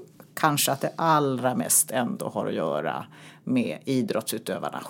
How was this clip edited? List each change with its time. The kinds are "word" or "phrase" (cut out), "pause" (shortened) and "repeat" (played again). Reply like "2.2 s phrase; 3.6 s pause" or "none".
none